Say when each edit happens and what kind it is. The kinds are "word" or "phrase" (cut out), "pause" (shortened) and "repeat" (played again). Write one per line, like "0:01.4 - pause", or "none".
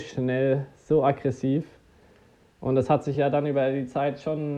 none

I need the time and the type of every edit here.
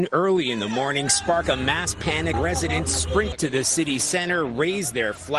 0:02.3 - word

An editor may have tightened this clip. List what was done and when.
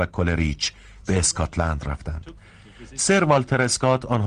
none

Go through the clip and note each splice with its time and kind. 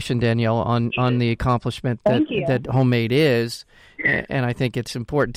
none

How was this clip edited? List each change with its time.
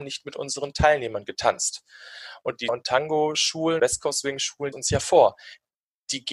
0:02.7 - word
0:03.8 - word
0:04.7 - phrase

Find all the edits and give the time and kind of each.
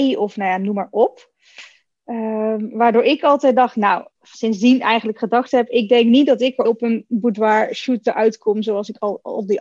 0:04.1 - pause
0:06.6 - phrase

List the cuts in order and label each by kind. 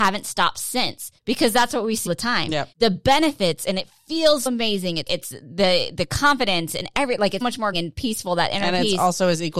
0:01.2 - pause
0:02.1 - word
0:02.7 - pause
0:04.5 - word
0:05.1 - phrase
0:07.4 - word
0:07.7 - word

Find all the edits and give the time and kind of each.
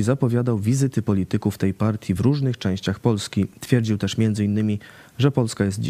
none

